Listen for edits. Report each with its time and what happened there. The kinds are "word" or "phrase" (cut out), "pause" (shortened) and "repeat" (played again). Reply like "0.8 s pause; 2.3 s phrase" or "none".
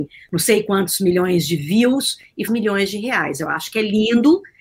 2.5 s word